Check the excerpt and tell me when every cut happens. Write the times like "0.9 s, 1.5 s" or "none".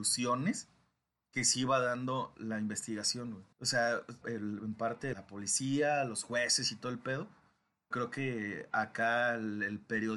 3.5 s, 4.2 s, 5.1 s, 7.9 s